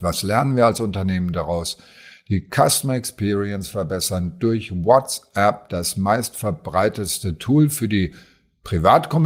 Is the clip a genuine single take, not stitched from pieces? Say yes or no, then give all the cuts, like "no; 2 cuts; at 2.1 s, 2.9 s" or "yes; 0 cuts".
yes; 0 cuts